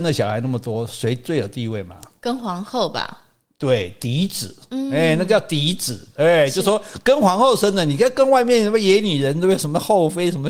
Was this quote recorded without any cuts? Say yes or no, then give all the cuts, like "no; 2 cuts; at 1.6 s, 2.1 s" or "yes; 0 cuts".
yes; 0 cuts